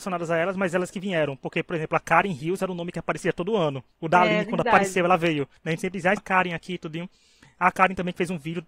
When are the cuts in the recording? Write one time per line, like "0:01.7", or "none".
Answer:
0:03.9
0:05.6
0:06.2